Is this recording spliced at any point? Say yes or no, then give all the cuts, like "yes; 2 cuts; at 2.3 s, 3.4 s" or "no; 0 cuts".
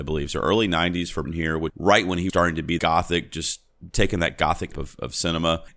yes; 6 cuts; at 1.2 s, 1.7 s, 2.3 s, 2.8 s, 3.9 s, 4.7 s